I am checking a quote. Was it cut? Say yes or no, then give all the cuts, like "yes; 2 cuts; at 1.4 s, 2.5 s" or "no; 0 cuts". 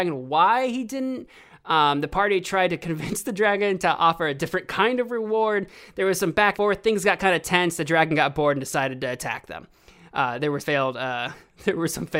yes; 2 cuts; at 6.5 s, 10.6 s